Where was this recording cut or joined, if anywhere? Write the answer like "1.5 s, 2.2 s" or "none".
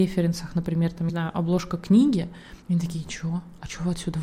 1.1 s, 2.6 s